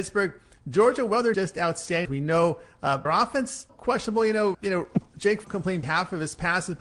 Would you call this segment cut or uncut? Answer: cut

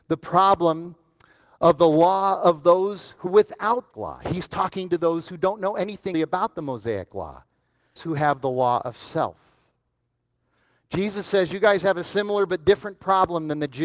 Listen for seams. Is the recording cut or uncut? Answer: cut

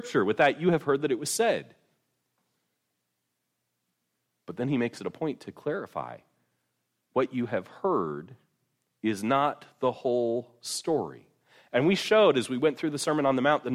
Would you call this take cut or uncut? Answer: uncut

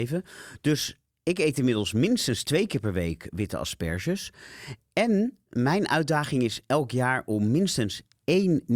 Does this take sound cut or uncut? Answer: uncut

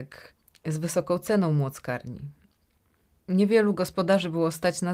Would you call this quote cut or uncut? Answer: uncut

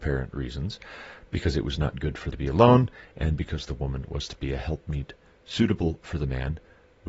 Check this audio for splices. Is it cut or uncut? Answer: cut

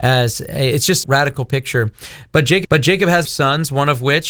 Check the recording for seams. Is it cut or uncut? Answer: cut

